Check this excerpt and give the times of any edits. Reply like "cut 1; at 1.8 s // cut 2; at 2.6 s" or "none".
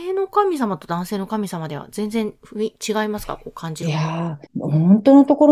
cut 1; at 4.5 s